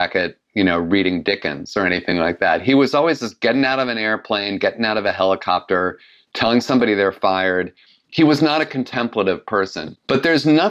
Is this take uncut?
yes; 0 cuts

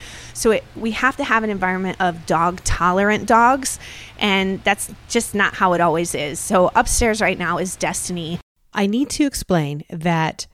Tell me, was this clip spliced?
no; 0 cuts

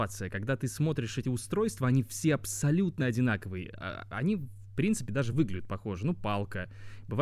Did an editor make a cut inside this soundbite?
no; 0 cuts

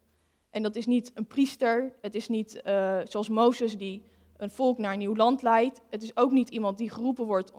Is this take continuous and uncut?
yes; 0 cuts

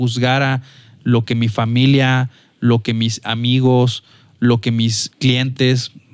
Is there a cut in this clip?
yes; 1 cut; at 5.1 s

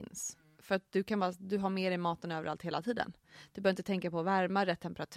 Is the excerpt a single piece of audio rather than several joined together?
yes; 0 cuts

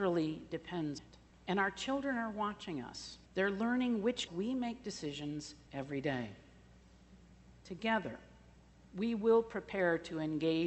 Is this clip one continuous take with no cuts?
no; 5 cuts; at 1.0 s, 1.3 s, 3.3 s, 4.3 s, 5.7 s

